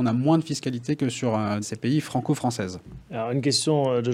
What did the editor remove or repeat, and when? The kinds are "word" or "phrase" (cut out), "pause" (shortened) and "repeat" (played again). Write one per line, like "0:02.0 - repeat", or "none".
0:01.6 - word